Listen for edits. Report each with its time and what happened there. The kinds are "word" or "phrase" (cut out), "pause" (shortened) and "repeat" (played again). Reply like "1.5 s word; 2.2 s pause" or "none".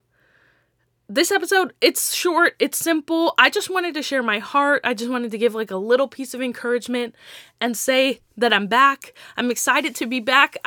none